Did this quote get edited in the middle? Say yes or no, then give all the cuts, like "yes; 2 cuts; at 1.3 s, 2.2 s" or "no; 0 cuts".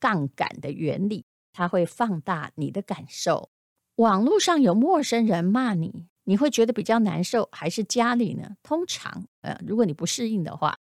yes; 2 cuts; at 3.7 s, 6.1 s